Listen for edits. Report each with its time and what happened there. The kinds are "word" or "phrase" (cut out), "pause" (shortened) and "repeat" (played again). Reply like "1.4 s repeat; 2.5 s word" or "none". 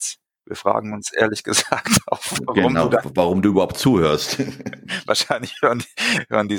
none

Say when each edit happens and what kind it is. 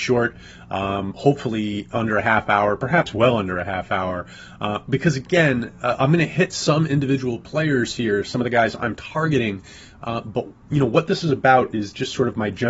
none

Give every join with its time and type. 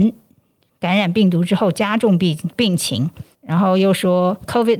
3.3 s pause

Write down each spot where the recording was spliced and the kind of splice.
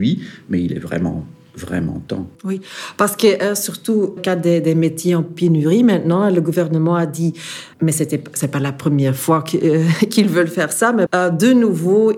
2.3 s pause; 4.2 s phrase; 7.7 s pause; 11.1 s word

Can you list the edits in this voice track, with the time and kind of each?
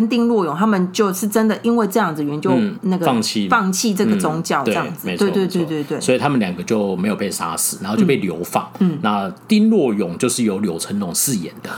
2.7 s word

